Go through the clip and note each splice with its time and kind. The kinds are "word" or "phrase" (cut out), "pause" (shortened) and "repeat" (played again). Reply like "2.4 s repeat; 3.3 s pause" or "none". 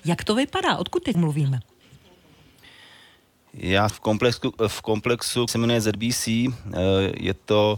1.1 s word; 3.9 s word; 5.5 s word